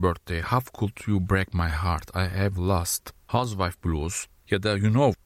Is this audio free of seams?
yes; 0 cuts

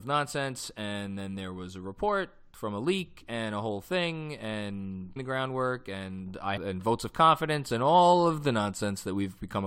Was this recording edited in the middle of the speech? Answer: yes; 2 cuts; at 5.2 s, 6.6 s

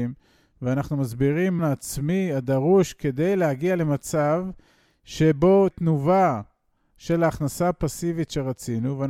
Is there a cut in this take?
yes; 2 cuts; at 1.6 s, 5.7 s

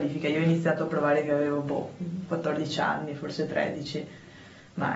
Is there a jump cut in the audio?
no; 0 cuts

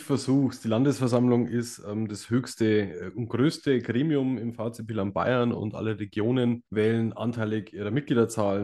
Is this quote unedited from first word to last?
no; 1 cut; at 6.7 s

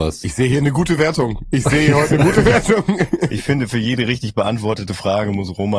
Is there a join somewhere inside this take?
no; 0 cuts

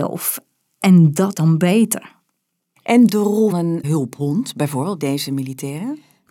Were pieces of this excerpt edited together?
yes; 5 cuts; at 1.3 s, 3.1 s, 3.5 s, 3.8 s, 5.0 s

